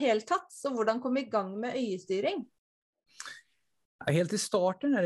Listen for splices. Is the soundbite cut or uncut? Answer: uncut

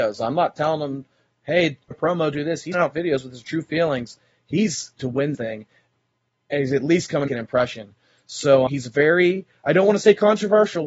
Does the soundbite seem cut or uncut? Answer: cut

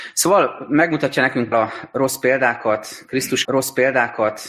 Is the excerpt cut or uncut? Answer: cut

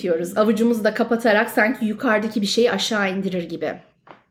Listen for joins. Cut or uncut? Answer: uncut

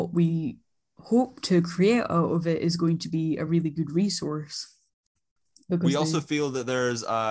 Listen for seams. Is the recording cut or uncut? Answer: uncut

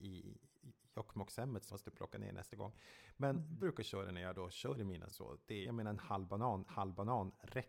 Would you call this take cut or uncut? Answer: cut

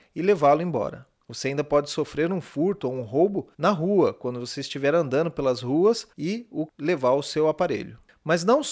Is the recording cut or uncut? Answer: cut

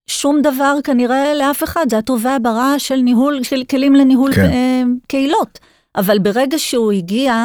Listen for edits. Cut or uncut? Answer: uncut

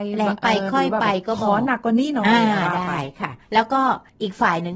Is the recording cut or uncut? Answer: cut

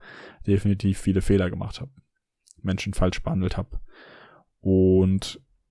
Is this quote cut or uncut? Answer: uncut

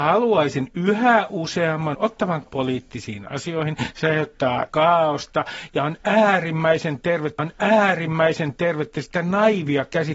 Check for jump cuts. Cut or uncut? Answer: cut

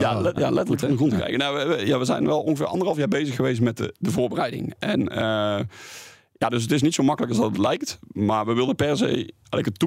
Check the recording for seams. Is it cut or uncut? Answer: uncut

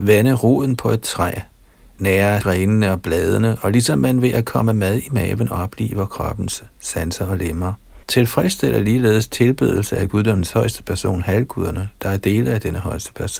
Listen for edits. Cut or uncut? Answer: cut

